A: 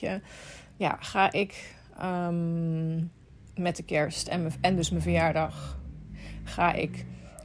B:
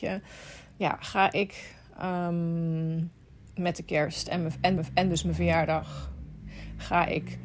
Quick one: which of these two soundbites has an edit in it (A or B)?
B